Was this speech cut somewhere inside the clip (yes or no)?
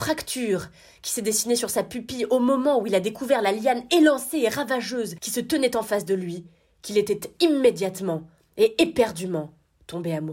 no